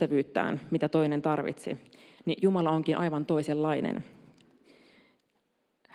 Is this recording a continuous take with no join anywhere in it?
yes; 0 cuts

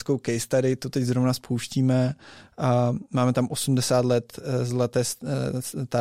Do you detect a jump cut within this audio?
no; 0 cuts

